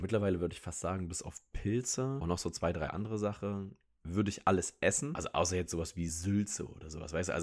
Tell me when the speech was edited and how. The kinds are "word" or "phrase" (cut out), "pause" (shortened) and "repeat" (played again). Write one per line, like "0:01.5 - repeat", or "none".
none